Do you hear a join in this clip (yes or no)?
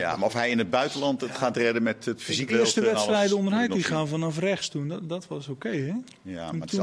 yes